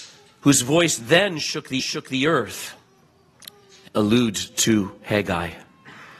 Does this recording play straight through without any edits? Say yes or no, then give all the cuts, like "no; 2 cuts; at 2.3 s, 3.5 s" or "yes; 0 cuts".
no; 2 cuts; at 1.8 s, 3.9 s